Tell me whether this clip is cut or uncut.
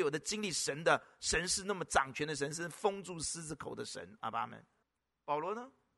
cut